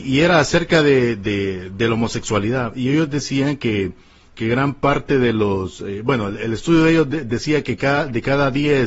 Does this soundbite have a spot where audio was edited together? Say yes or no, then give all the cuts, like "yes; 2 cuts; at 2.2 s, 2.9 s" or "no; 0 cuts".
no; 0 cuts